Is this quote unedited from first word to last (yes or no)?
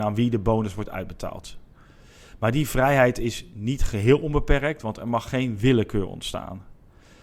yes